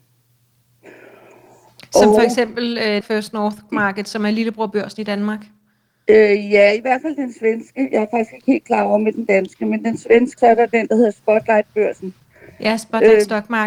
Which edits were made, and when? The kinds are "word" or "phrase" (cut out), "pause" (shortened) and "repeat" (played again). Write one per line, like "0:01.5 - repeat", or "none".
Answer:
0:03.0 - word
0:03.7 - word
0:10.4 - word